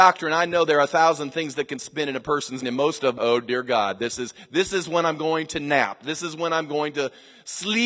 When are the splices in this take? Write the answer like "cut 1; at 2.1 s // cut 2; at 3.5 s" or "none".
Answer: cut 1; at 2.6 s // cut 2; at 3.2 s